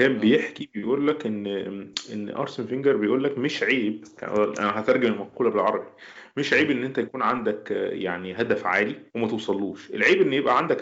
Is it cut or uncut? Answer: cut